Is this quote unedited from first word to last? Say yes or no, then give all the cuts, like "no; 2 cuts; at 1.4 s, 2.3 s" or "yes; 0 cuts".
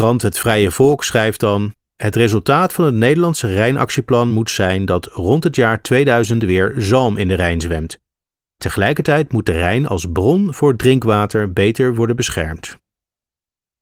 yes; 0 cuts